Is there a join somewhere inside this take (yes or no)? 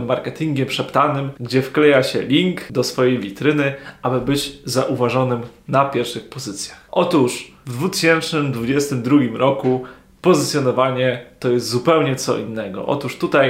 no